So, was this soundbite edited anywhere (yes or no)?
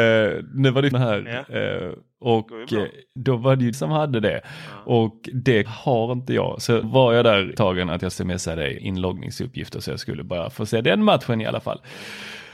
yes